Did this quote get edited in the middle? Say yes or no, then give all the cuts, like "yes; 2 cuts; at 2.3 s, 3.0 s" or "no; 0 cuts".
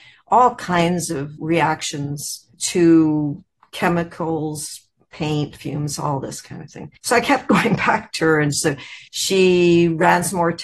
yes; 4 cuts; at 1.4 s, 2.5 s, 7.0 s, 9.1 s